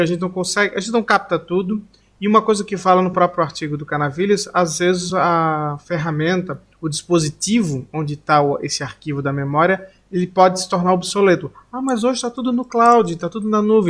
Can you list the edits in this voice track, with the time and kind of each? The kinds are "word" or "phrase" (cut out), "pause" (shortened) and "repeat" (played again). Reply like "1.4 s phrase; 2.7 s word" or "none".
none